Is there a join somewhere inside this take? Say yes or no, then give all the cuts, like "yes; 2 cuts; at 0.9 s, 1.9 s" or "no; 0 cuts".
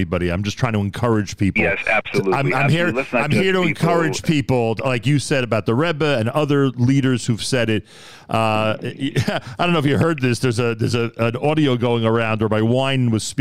no; 0 cuts